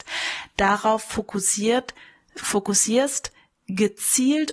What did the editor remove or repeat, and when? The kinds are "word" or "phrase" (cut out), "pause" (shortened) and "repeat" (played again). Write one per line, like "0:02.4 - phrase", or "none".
none